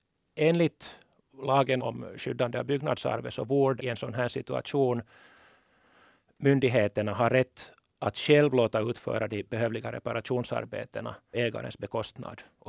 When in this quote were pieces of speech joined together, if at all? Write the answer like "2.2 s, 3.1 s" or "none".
1.8 s, 3.8 s, 11.3 s